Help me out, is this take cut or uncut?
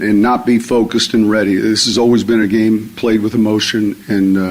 uncut